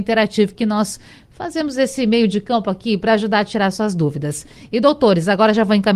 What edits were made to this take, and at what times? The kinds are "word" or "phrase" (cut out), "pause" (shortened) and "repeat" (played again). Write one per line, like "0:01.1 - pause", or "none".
none